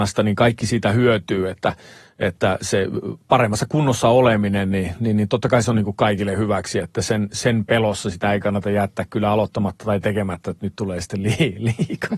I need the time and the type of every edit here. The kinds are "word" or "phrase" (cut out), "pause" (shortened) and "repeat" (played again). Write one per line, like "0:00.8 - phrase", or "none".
none